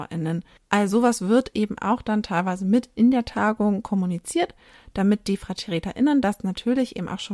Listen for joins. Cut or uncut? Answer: uncut